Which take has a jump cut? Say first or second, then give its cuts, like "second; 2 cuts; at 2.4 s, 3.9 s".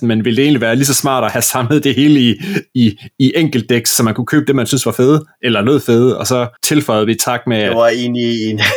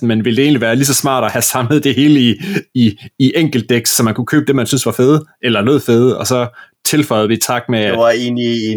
first; 1 cut; at 6.6 s